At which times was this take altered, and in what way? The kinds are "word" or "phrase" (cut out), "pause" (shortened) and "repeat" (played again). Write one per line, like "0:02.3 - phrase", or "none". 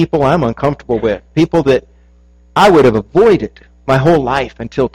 none